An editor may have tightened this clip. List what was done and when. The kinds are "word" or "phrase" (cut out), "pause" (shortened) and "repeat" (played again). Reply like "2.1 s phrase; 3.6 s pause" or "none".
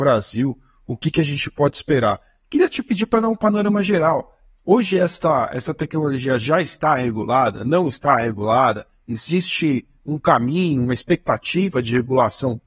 none